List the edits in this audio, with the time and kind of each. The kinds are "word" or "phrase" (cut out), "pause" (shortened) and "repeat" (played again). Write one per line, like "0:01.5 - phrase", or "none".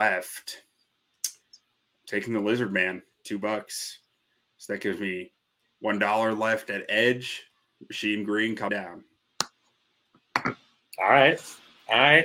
0:08.7 - word